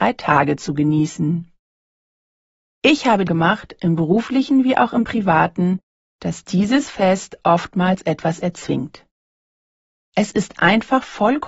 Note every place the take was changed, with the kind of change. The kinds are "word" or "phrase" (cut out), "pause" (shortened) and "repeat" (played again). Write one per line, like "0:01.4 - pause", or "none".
0:03.3 - word